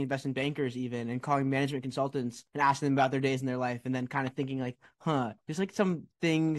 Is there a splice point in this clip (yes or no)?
yes